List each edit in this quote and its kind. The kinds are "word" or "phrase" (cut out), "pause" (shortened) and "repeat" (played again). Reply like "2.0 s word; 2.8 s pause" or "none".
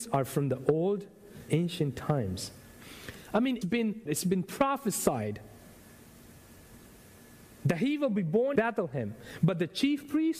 1.5 s word; 3.6 s word; 4.1 s word; 8.6 s word